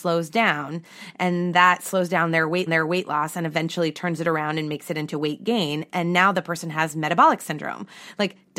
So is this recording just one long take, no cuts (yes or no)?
no